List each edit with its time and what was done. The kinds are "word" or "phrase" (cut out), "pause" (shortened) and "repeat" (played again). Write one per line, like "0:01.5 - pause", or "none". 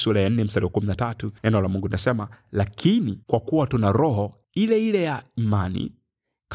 0:01.4 - pause
0:03.2 - pause
0:04.4 - pause